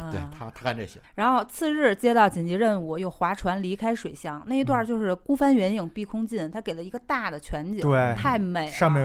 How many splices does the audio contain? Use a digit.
1